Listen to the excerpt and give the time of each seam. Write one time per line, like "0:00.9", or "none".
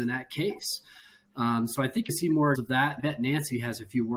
0:02.1
0:02.5
0:03.0